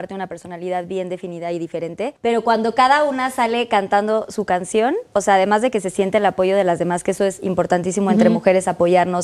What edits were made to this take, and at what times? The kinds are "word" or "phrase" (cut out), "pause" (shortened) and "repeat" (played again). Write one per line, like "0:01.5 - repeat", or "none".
0:02.2 - pause
0:05.1 - pause